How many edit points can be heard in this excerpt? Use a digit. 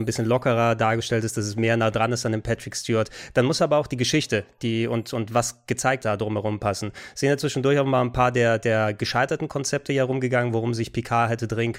1